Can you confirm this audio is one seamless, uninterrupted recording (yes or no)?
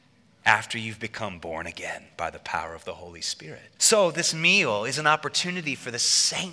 no